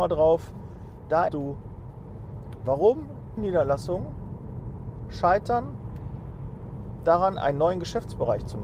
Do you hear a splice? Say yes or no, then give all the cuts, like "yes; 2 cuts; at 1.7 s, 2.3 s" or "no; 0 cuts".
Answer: yes; 2 cuts; at 1.3 s, 3.4 s